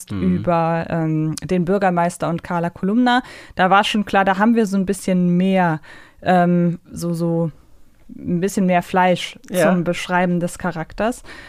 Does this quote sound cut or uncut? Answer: uncut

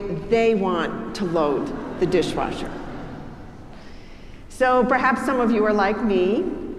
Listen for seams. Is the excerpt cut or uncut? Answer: uncut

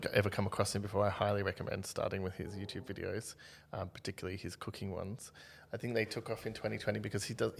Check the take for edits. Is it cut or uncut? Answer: uncut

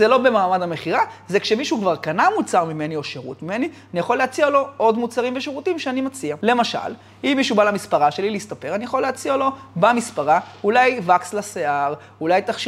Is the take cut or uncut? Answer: uncut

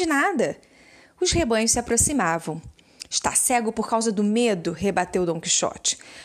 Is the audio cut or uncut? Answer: uncut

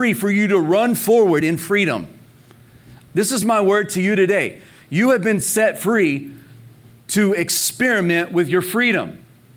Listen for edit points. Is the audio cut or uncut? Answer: uncut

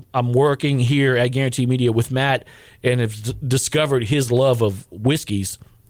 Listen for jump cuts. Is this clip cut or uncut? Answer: uncut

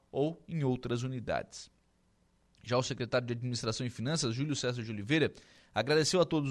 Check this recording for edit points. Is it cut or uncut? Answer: uncut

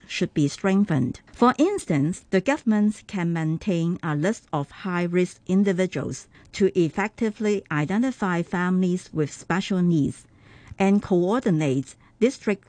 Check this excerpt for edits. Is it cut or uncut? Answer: cut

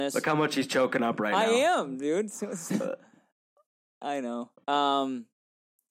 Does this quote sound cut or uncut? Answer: uncut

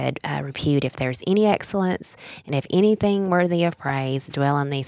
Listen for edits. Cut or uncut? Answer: uncut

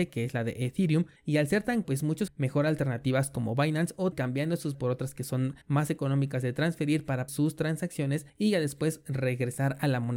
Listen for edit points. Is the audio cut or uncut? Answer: cut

